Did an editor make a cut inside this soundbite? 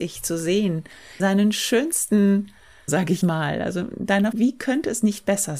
yes; 4 cuts; at 1.2 s, 2.9 s, 3.2 s, 4.3 s

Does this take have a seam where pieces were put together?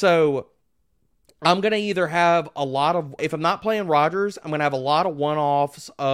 yes; 1 cut; at 3.2 s

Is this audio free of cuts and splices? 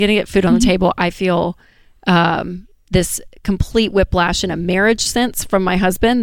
yes; 0 cuts

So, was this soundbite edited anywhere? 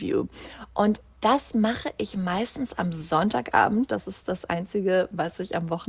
no; 0 cuts

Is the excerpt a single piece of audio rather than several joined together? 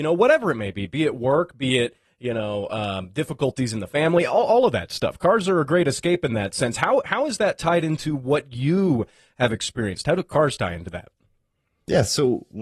yes; 0 cuts

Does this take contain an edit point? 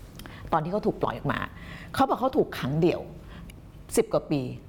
yes; 1 cut; at 3.5 s

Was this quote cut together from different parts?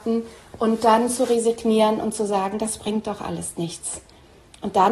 no; 0 cuts

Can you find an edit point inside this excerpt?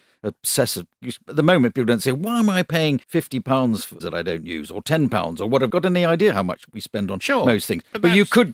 yes; 3 cuts; at 3.0 s, 4.0 s, 5.7 s

